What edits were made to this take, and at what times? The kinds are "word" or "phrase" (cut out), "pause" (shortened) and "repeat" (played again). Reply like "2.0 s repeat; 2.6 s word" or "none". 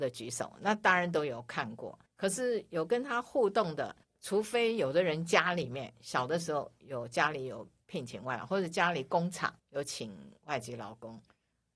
2.1 s pause; 4.0 s pause; 9.6 s pause